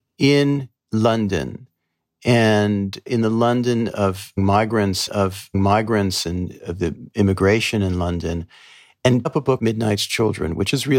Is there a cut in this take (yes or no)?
yes